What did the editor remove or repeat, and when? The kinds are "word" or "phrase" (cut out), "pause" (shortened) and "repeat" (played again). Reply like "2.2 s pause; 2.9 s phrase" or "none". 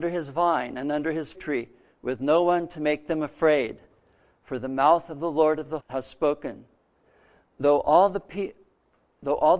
1.3 s word; 5.8 s word